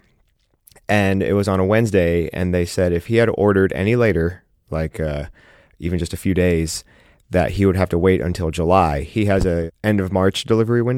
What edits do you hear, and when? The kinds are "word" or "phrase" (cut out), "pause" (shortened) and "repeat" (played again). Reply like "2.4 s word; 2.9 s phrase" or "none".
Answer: none